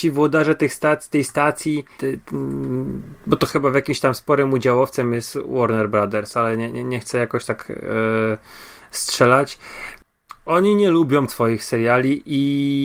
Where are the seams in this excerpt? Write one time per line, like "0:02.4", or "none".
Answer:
0:02.0
0:03.2
0:11.3